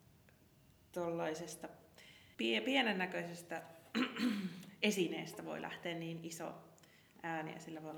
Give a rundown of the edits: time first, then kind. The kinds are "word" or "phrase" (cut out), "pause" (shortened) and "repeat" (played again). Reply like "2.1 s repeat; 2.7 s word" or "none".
2.3 s pause